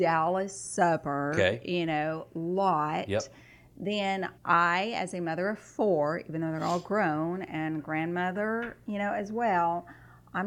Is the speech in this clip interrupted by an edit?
yes; 1 cut; at 4.4 s

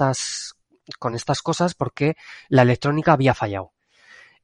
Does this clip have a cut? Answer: no; 0 cuts

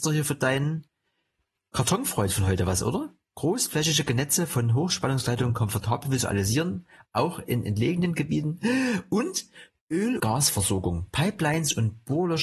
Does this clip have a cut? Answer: yes; 1 cut; at 10.2 s

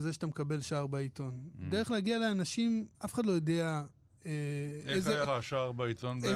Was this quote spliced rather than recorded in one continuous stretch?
yes; 2 cuts; at 2.9 s, 5.2 s

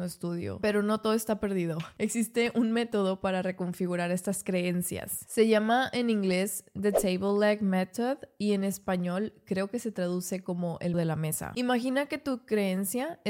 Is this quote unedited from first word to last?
no; 1 cut; at 10.9 s

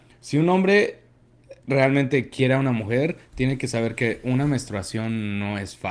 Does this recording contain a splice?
no; 0 cuts

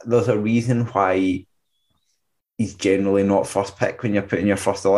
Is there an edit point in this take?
no; 0 cuts

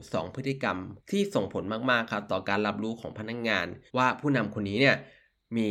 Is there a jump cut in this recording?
yes; 2 cuts; at 1.0 s, 3.9 s

